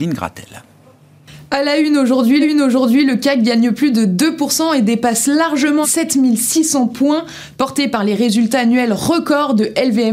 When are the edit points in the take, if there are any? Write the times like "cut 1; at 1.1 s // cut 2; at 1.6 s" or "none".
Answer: cut 1; at 2.4 s // cut 2; at 5.8 s